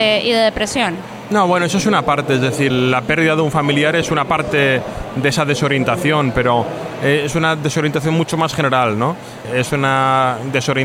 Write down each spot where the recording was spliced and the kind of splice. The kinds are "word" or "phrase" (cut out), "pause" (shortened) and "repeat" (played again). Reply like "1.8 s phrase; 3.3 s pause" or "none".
none